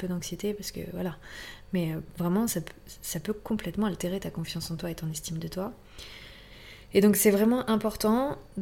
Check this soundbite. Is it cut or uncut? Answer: uncut